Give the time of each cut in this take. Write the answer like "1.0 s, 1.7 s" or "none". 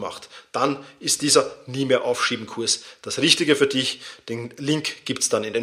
none

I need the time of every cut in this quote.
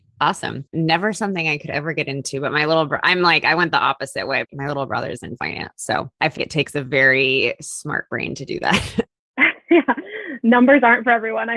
6.4 s

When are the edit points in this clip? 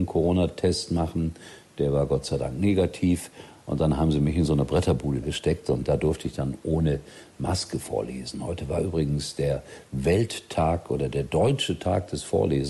5.2 s

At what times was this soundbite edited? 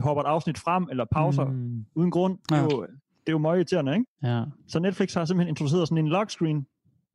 none

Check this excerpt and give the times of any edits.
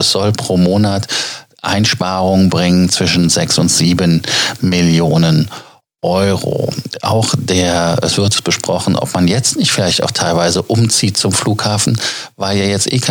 none

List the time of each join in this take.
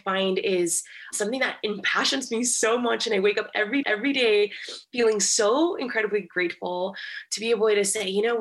3.8 s

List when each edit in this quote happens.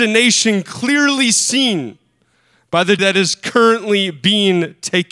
3.0 s

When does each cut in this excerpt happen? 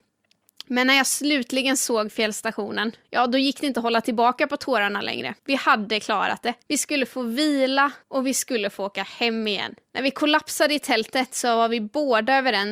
3.0 s, 5.4 s, 6.6 s, 8.0 s, 9.8 s

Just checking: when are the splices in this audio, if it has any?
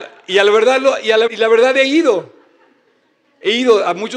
1.3 s

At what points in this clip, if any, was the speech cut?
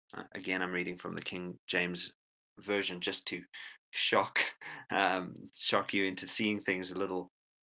none

